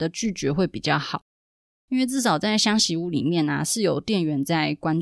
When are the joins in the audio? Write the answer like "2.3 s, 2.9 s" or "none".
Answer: none